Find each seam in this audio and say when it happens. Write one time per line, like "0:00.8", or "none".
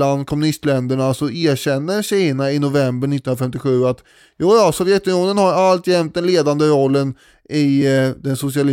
none